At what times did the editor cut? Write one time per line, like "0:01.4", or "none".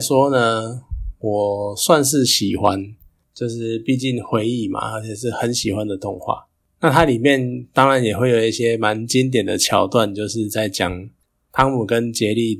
none